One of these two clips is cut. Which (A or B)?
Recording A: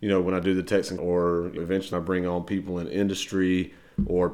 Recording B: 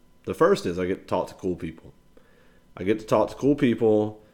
A